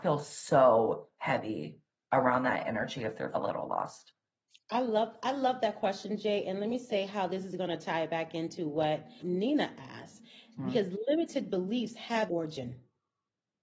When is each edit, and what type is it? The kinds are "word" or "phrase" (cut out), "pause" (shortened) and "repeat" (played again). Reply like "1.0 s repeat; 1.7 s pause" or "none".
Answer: 3.3 s word; 9.2 s word; 12.3 s word